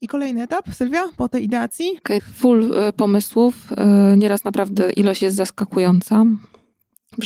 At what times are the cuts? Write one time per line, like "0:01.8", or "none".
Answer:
0:02.2